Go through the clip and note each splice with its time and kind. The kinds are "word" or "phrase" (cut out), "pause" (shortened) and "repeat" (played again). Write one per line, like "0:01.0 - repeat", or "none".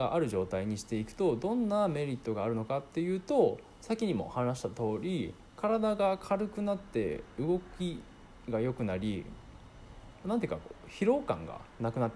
0:05.5 - pause